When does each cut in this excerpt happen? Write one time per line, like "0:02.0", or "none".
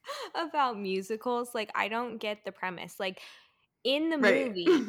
none